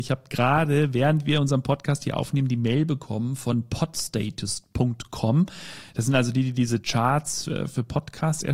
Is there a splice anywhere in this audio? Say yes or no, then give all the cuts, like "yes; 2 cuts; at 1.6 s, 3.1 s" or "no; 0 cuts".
no; 0 cuts